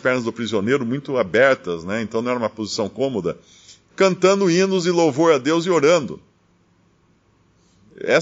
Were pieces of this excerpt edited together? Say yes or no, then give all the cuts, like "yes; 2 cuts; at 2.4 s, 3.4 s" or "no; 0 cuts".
no; 0 cuts